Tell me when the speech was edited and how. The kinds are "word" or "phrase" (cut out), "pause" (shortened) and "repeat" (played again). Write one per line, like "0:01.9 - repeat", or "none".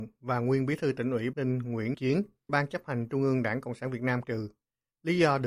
0:01.3 - word
0:01.9 - word
0:02.5 - word
0:04.2 - word